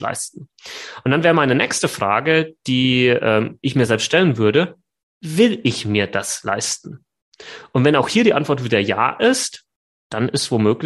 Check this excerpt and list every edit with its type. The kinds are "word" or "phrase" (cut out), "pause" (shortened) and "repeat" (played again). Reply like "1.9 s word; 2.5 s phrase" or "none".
none